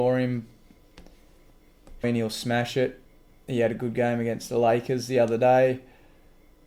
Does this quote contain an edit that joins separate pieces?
yes; 1 cut; at 2.0 s

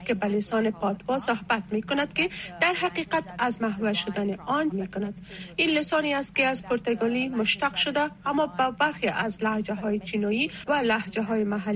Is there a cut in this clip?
yes; 1 cut; at 4.7 s

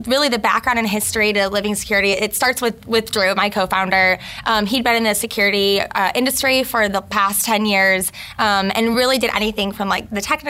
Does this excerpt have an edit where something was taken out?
no; 0 cuts

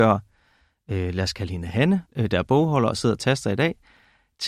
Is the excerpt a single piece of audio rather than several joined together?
no; 1 cut; at 2.0 s

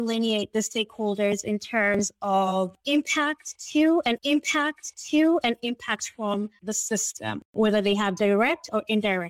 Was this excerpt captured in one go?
no; 1 cut; at 4.2 s

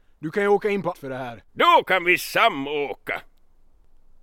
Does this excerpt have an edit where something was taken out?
yes; 2 cuts; at 0.9 s, 1.5 s

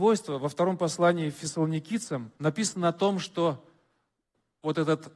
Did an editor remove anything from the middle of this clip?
yes; 1 cut; at 2.4 s

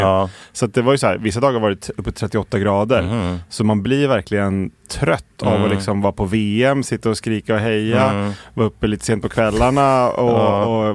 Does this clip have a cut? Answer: no; 0 cuts

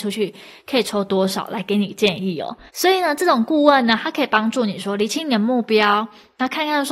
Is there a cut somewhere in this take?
yes; 1 cut; at 2.7 s

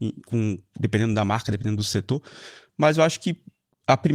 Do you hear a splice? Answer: no; 0 cuts

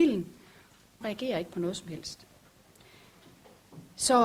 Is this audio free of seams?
no; 1 cut; at 1.0 s

